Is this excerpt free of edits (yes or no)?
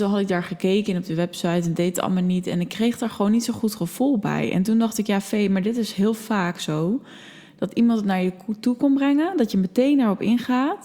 yes